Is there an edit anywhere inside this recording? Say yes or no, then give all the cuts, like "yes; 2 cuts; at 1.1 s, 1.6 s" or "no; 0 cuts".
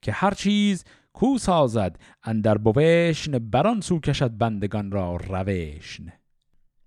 no; 0 cuts